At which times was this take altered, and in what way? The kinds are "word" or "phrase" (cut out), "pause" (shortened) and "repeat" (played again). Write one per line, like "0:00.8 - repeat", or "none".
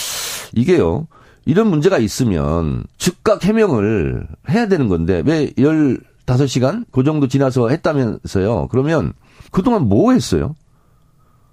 0:02.9 - pause
0:06.9 - pause
0:09.5 - pause